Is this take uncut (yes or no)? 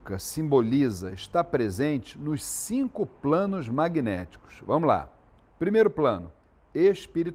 yes